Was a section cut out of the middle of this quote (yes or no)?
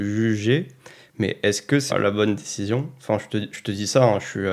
yes